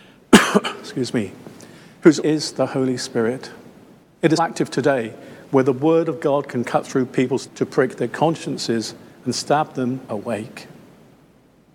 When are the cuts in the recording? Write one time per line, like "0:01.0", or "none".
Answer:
0:02.2
0:04.0
0:04.4
0:07.5
0:10.1